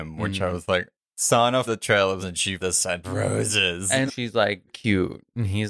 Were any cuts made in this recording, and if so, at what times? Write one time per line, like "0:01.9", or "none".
0:01.0
0:01.6
0:02.2
0:02.6
0:03.0
0:04.1
0:04.7